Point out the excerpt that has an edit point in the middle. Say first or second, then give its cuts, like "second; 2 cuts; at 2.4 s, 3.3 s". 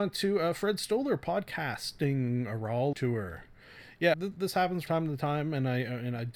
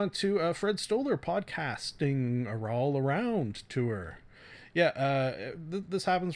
first; 3 cuts; at 2.9 s, 4.1 s, 4.9 s